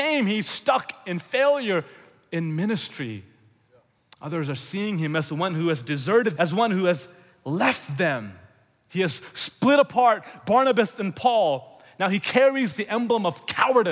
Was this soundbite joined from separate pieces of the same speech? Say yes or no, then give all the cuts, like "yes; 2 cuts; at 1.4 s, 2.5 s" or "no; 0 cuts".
yes; 1 cut; at 6.4 s